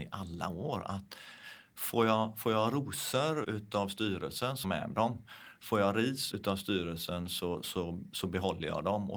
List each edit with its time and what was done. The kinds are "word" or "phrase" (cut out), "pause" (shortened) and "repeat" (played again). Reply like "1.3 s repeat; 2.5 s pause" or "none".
3.4 s word; 4.6 s phrase; 6.3 s word